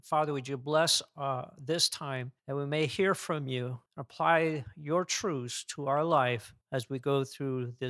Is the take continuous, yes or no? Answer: no